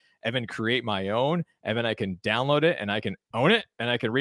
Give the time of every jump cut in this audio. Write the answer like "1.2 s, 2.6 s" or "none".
none